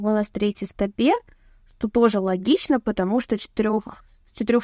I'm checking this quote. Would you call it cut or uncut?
uncut